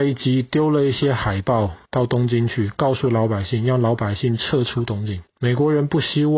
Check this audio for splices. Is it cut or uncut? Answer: cut